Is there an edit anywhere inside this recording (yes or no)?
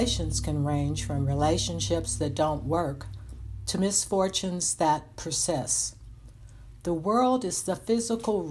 no